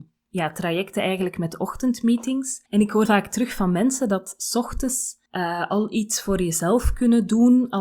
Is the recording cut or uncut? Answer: cut